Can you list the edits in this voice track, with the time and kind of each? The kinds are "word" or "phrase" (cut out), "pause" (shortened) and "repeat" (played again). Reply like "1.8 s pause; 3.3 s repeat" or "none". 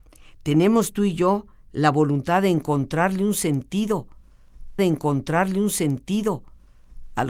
4.8 s repeat